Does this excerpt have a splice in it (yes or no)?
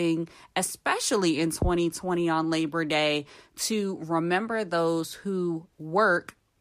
no